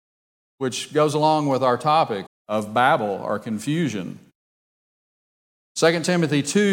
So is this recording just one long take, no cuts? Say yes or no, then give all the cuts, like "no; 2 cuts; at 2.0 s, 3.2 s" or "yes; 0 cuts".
no; 1 cut; at 2.3 s